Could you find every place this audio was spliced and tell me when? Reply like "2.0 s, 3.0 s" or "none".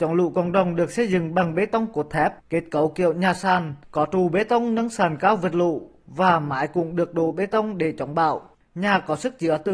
2.4 s, 3.8 s, 8.5 s